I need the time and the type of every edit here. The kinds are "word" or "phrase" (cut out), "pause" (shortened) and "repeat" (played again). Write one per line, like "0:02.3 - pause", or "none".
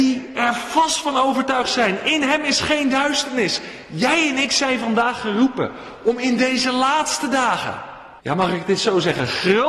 0:08.2 - pause